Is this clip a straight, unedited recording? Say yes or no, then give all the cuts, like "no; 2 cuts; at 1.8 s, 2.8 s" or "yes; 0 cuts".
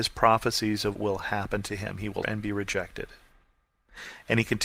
no; 2 cuts; at 0.9 s, 2.2 s